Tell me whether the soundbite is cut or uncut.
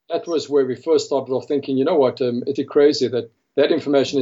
cut